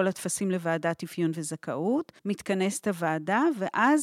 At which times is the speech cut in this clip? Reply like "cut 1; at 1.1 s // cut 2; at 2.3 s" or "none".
cut 1; at 2.2 s